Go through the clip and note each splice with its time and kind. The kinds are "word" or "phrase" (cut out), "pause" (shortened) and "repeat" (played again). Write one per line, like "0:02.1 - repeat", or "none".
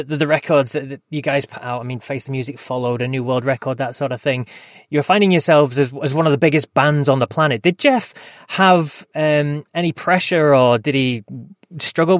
none